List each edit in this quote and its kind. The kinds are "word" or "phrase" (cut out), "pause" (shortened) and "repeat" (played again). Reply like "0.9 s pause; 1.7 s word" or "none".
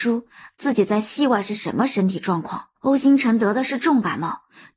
2.8 s pause